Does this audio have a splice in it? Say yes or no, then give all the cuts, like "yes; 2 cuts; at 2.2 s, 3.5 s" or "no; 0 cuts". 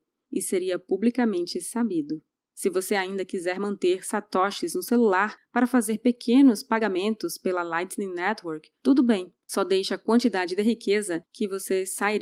no; 0 cuts